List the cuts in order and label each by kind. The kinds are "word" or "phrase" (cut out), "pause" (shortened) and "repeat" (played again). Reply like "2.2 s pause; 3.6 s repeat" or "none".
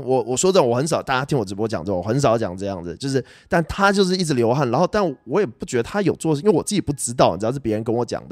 none